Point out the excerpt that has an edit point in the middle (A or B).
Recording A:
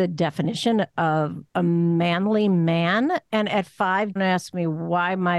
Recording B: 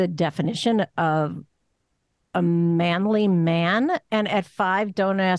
A